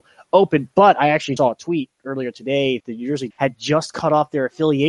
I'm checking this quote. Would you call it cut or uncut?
cut